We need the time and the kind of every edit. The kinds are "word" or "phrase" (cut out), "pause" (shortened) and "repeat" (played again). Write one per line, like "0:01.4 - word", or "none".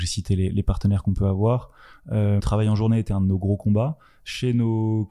0:02.4 - word